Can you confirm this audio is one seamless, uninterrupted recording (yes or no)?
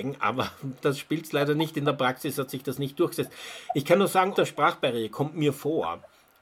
no